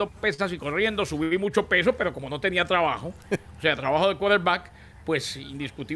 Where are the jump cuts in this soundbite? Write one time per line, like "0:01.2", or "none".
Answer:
none